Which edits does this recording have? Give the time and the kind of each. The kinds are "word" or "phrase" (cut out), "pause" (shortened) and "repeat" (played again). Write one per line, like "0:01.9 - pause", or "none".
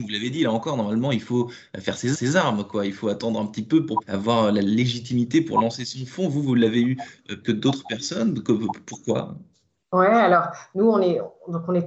0:02.1 - repeat
0:04.0 - word
0:07.4 - phrase